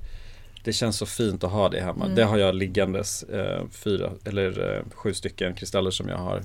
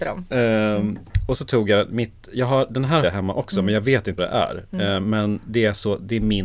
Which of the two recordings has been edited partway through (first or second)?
second